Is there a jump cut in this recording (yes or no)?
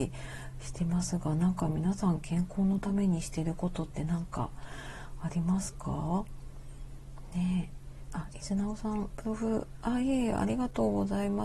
yes